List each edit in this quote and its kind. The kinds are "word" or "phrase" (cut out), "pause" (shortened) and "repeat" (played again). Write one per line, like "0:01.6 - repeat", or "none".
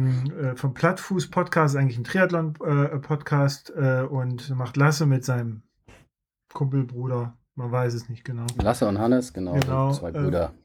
none